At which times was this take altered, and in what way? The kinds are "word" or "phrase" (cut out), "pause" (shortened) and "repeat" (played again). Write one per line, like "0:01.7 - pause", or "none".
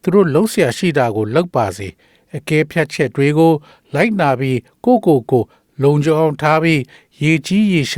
none